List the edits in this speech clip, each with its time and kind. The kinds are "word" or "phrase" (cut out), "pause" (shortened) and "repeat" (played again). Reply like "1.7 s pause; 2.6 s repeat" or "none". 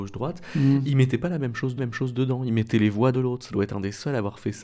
1.8 s repeat; 3.1 s phrase

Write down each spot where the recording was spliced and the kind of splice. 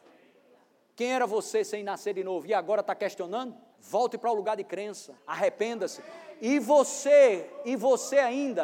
3.7 s pause; 5.2 s pause

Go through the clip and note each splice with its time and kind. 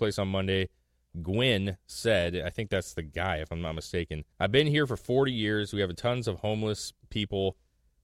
4.3 s pause

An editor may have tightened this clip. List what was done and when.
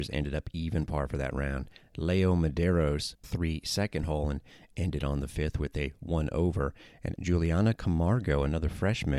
3.2 s phrase; 7.2 s word

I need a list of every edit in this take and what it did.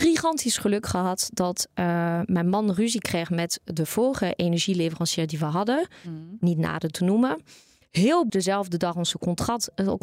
8.3 s word

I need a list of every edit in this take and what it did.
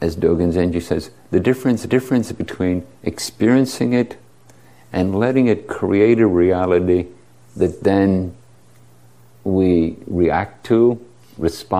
1.9 s repeat

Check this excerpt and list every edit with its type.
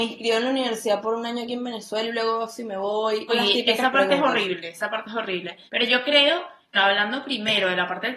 3.3 s phrase; 5.7 s pause; 6.7 s word

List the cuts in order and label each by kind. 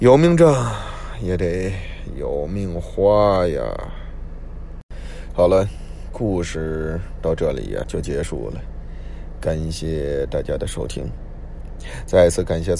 7.8 s word

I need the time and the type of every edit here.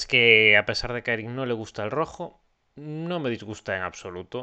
none

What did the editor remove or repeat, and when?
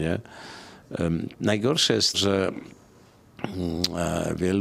2.1 s word

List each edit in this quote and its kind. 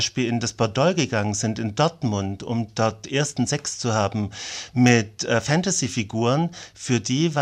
none

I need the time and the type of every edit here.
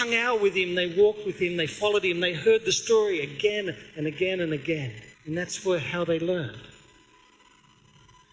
5.1 s pause

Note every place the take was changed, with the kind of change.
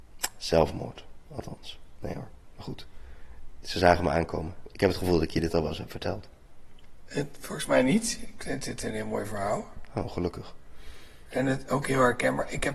none

